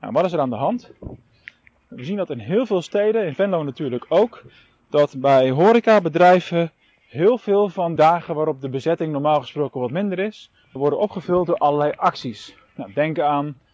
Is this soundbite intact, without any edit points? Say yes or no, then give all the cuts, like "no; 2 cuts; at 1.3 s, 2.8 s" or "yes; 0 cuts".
no; 2 cuts; at 8.0 s, 10.8 s